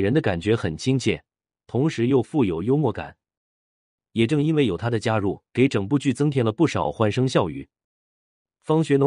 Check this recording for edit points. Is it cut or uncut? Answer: cut